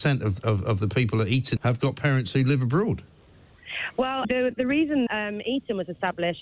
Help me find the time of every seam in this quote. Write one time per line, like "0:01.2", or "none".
0:01.6
0:04.2
0:05.1

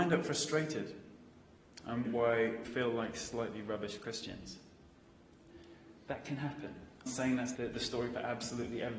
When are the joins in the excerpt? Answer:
0:02.0
0:02.6
0:07.1
0:07.5

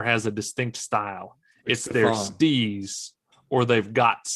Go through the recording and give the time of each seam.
none

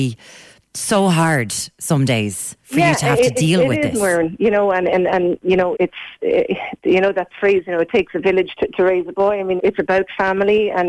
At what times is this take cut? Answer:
0:02.6
0:05.7
0:09.6

